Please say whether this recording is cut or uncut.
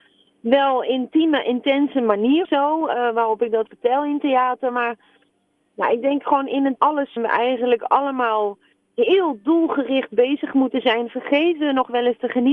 cut